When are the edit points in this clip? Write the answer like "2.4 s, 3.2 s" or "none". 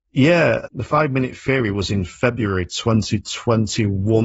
none